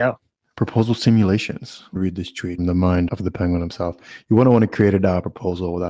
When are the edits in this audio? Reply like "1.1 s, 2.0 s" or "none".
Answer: 2.0 s, 2.6 s, 3.1 s